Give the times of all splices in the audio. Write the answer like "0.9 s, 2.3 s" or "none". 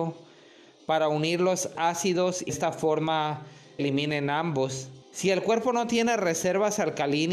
1.8 s, 2.5 s, 3.8 s, 5.0 s